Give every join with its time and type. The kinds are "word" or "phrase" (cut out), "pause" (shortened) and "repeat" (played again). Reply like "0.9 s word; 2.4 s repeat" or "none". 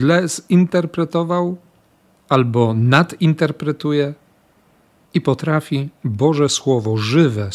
none